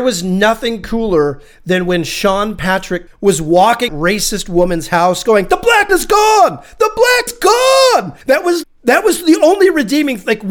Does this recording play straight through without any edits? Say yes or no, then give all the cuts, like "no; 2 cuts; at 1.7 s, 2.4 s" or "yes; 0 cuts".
no; 6 cuts; at 3.1 s, 3.9 s, 5.9 s, 7.3 s, 8.2 s, 8.6 s